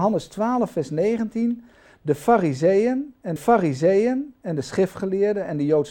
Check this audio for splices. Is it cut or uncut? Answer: cut